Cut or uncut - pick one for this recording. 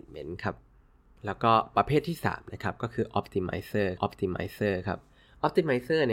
cut